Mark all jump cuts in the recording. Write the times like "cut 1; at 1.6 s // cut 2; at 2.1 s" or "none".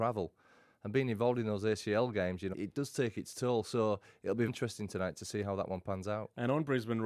cut 1; at 2.5 s // cut 2; at 4.5 s